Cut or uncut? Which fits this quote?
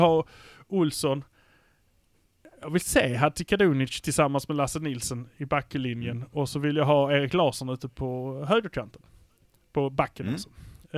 uncut